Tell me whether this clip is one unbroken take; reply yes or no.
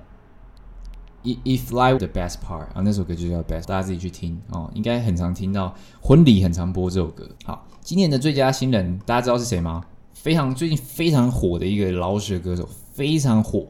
no